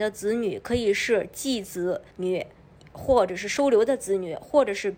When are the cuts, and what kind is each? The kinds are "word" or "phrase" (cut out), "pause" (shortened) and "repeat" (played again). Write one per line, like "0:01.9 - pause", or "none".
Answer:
0:02.1 - pause

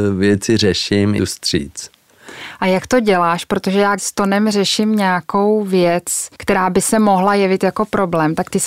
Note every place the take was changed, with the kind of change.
0:01.2 - phrase
0:04.0 - word
0:06.3 - pause

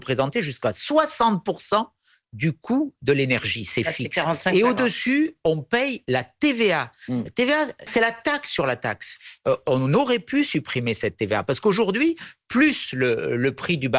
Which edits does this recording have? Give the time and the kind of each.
0:07.9 - word

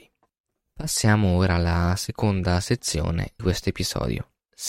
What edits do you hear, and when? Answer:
0:03.4 - word

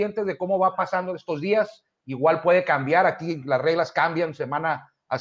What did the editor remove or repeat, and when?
none

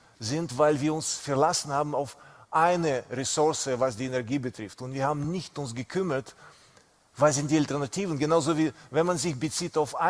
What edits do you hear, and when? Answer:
none

